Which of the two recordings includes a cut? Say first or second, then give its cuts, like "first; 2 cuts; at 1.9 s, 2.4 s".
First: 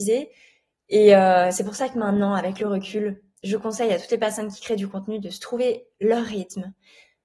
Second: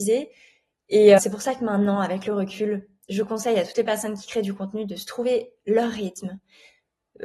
second; 1 cut; at 1.2 s